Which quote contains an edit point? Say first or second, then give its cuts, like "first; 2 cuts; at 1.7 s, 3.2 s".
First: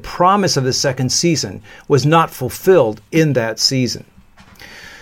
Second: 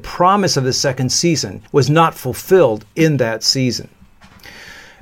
second; 1 cut; at 1.7 s